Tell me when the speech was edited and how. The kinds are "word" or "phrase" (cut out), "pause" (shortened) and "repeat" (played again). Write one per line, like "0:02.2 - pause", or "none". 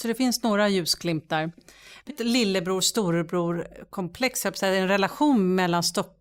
0:02.1 - phrase